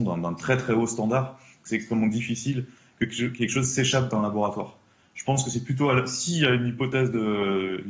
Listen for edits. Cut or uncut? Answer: uncut